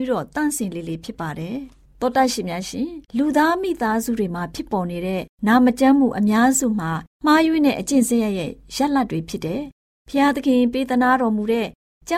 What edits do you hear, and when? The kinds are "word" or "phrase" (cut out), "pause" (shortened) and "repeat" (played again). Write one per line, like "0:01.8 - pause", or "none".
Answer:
0:03.1 - pause
0:05.3 - pause
0:07.1 - pause